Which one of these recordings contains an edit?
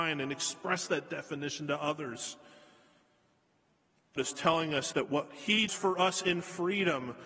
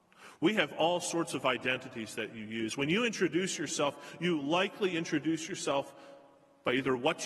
first; 3 cuts; at 4.2 s, 4.9 s, 5.7 s

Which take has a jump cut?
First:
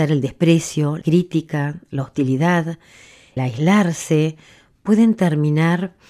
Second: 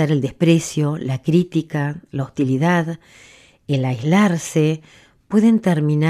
first; 2 cuts; at 1.0 s, 3.4 s

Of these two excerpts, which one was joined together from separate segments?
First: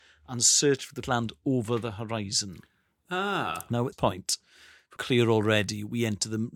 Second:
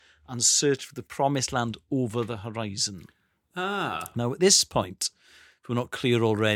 first; 3 cuts; at 1.0 s, 3.9 s, 5.0 s

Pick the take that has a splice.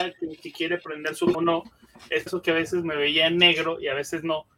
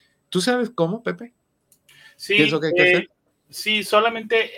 first; 2 cuts; at 1.3 s, 2.3 s

